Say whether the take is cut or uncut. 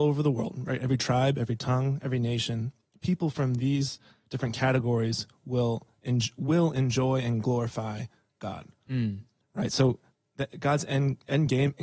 uncut